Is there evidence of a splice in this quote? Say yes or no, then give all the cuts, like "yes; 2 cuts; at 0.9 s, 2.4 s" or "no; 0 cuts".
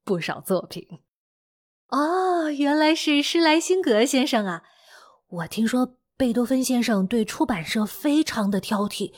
no; 0 cuts